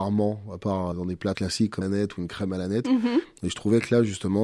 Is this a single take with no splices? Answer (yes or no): no